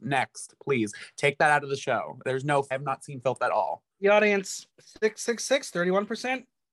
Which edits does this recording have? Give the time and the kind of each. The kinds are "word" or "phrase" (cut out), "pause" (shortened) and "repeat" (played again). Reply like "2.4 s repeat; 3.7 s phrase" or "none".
2.7 s word; 3.9 s pause; 4.7 s pause